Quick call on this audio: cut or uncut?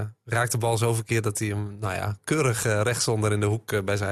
uncut